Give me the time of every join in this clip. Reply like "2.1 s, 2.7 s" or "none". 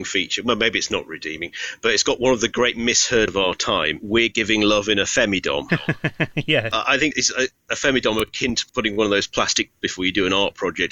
3.3 s, 7.1 s, 9.7 s